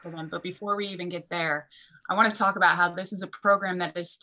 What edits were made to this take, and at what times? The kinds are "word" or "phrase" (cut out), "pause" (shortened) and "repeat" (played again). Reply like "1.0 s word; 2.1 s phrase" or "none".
none